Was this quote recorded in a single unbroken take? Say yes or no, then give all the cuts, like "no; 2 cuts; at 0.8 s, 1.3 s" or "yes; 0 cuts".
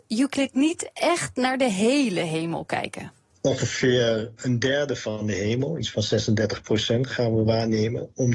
yes; 0 cuts